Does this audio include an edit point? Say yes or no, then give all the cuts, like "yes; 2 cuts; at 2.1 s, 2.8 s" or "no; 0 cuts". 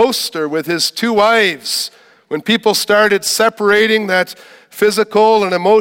no; 0 cuts